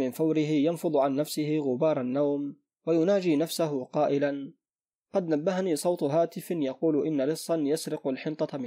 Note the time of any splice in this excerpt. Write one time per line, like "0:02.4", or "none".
none